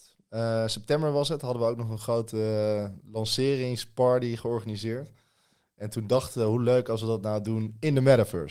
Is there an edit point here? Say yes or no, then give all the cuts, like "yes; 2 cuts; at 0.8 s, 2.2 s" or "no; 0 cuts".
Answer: no; 0 cuts